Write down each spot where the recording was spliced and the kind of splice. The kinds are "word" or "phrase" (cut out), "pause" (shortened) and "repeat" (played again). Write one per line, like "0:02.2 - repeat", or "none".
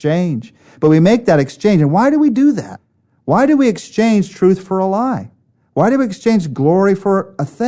none